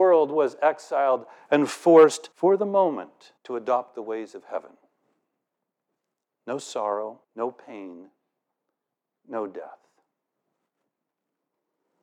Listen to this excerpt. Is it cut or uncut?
cut